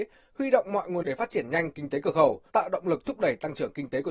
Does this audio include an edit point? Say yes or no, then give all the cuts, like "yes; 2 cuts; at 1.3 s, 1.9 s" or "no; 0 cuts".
yes; 2 cuts; at 1.0 s, 2.5 s